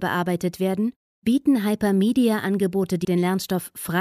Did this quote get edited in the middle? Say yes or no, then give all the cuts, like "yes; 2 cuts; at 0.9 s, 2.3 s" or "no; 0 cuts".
yes; 1 cut; at 3.0 s